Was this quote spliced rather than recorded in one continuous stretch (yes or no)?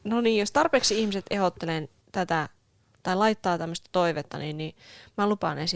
no